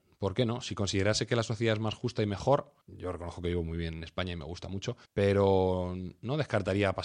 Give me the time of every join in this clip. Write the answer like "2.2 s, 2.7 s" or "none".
2.8 s, 5.1 s

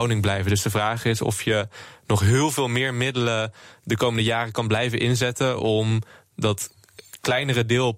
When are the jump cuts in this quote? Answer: none

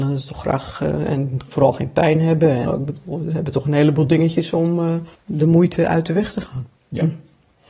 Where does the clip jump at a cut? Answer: 2.7 s, 5.1 s

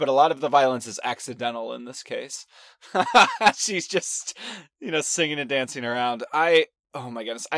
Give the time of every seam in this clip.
none

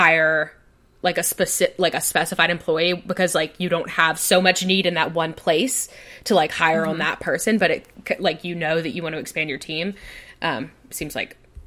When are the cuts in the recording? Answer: none

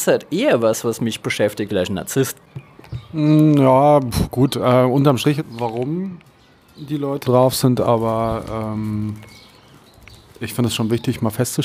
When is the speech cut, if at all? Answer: 1.7 s, 5.4 s, 7.2 s

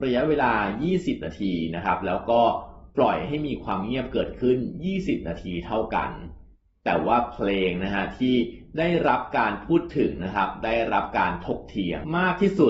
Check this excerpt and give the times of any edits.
6.5 s

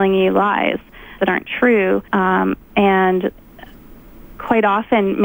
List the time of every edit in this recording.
1.2 s, 2.1 s

